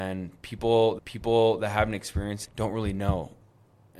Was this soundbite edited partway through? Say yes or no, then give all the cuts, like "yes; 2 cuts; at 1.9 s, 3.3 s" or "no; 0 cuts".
yes; 2 cuts; at 1.0 s, 2.5 s